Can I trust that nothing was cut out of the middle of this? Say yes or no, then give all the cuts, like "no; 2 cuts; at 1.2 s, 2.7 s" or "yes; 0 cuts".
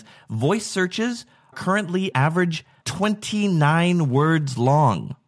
no; 3 cuts; at 1.5 s, 2.1 s, 2.8 s